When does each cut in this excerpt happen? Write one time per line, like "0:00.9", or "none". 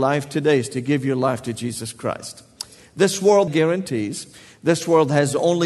0:03.5